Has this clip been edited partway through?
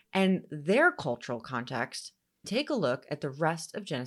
yes; 1 cut; at 2.4 s

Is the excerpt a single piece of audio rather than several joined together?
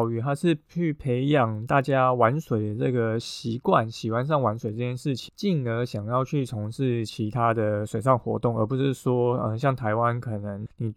yes; 0 cuts

